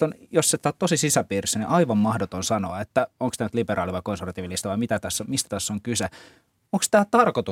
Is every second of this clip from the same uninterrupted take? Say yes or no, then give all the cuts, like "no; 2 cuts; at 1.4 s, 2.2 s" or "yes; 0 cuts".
yes; 0 cuts